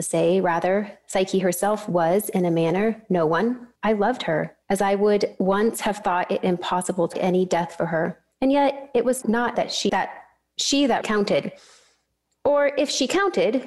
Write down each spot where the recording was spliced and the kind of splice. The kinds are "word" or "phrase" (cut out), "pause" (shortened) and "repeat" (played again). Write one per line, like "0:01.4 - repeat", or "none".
0:03.8 - pause
0:04.6 - pause
0:07.1 - phrase
0:08.3 - pause
0:09.2 - word
0:09.6 - word
0:09.9 - word
0:11.0 - word

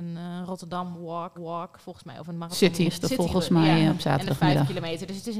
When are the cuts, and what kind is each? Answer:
0:01.3 - repeat
0:02.8 - word

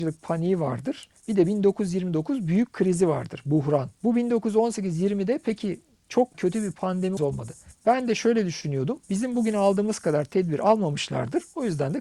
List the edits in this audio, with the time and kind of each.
0:01.2 - pause
0:06.3 - word
0:07.2 - phrase

